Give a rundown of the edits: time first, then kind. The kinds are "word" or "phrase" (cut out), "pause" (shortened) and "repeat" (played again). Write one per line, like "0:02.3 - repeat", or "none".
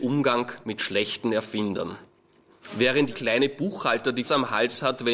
0:03.1 - word
0:04.2 - word